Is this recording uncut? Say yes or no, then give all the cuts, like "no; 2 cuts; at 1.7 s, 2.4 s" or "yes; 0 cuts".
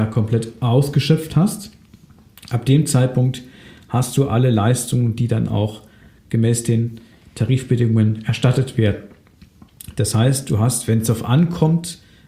yes; 0 cuts